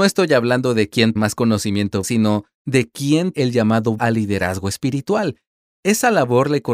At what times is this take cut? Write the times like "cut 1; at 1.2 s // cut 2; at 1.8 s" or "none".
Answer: cut 1; at 1.2 s // cut 2; at 2.0 s // cut 3; at 3.3 s // cut 4; at 4.0 s

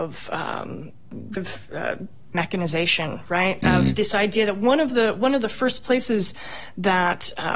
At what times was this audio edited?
cut 1; at 1.4 s // cut 2; at 2.3 s

